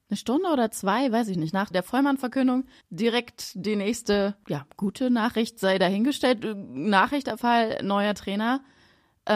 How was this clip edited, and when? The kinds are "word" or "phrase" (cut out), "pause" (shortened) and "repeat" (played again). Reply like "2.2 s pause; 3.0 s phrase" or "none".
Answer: 1.7 s word; 2.8 s pause; 7.4 s word

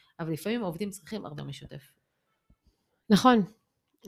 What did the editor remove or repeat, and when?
1.4 s word

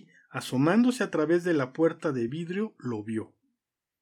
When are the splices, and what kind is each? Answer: none

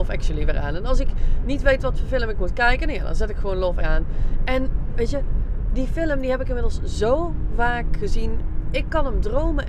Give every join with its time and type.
3.8 s word

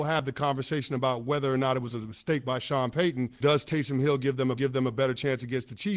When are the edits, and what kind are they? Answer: 3.4 s word; 4.6 s repeat

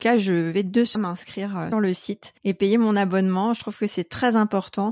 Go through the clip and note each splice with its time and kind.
0.9 s word; 1.7 s word; 2.4 s pause

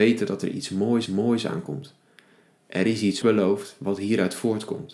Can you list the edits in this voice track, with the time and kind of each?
1.1 s repeat; 3.2 s word

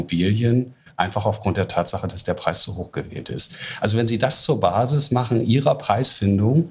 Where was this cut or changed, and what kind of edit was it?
none

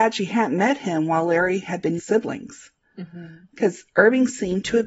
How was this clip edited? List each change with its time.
2.0 s phrase

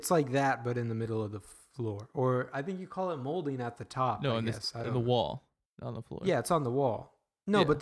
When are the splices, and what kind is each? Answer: none

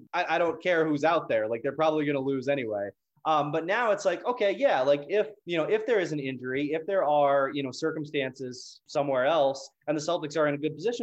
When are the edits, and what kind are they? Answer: none

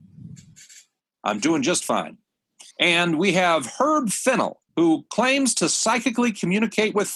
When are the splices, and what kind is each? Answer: 2.7 s pause; 4.7 s pause

